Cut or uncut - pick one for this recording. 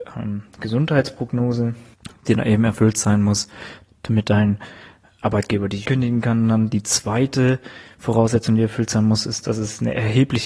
cut